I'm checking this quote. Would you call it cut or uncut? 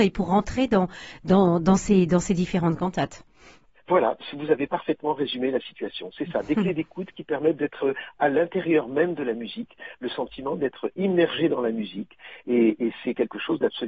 uncut